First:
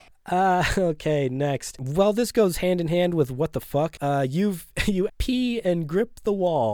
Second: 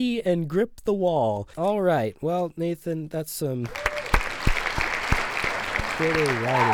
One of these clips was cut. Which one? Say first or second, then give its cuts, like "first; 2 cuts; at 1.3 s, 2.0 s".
first; 1 cut; at 5.1 s